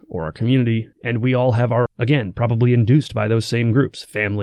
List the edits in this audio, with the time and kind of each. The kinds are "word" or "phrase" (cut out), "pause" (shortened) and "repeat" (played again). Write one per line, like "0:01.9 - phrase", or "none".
0:00.9 - pause
0:01.9 - phrase

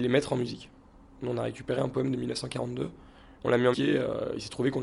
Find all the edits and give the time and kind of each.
0:03.7 - word

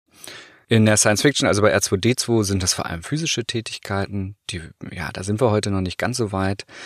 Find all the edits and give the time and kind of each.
none

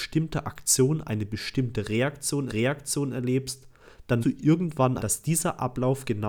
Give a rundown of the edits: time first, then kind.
0:02.5 - repeat
0:04.2 - word
0:05.0 - phrase

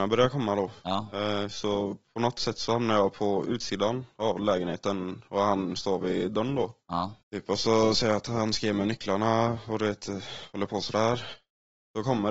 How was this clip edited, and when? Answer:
0:07.2 - pause

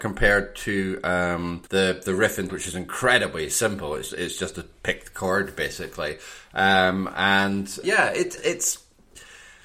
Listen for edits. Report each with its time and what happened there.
0:01.7 - pause
0:02.5 - phrase
0:04.1 - word
0:07.8 - word
0:08.4 - word

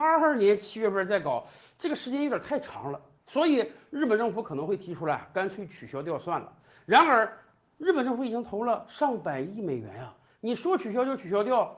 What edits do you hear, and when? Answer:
none

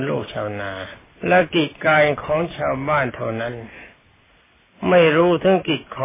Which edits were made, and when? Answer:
0:01.2 - pause

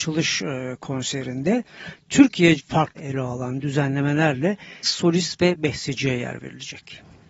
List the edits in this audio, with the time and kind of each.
0:02.6 - word
0:03.0 - word
0:04.8 - word

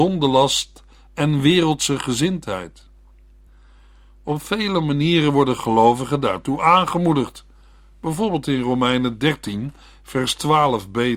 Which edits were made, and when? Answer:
none

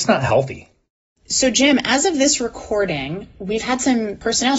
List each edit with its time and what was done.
none

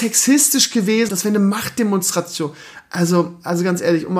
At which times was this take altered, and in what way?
0:01.1 - word

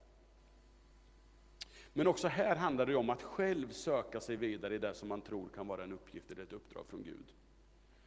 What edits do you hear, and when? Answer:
none

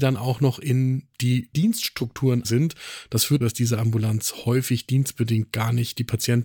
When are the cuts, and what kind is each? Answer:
0:01.5 - word
0:02.4 - word
0:03.4 - word

